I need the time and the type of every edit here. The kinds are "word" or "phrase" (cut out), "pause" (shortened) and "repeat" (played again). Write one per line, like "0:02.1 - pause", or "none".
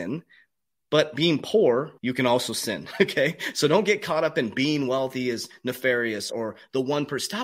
0:02.0 - pause
0:06.3 - word